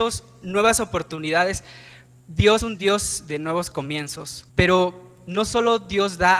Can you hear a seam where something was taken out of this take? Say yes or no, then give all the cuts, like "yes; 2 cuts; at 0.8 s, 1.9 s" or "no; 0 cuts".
yes; 2 cuts; at 2.6 s, 4.5 s